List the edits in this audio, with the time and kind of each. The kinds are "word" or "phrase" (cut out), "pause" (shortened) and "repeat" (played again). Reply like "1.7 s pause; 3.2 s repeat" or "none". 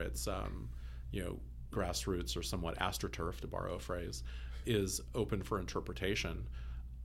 1.7 s word; 4.6 s word